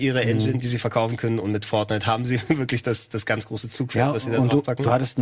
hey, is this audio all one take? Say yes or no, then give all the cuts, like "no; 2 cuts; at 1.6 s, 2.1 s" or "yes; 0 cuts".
yes; 0 cuts